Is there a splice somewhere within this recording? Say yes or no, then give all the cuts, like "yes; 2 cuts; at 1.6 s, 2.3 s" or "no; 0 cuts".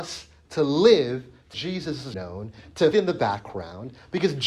yes; 3 cuts; at 1.5 s, 2.1 s, 2.9 s